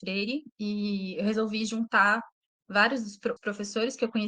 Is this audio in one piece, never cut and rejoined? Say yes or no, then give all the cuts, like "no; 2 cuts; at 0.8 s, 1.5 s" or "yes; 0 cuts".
no; 1 cut; at 3.4 s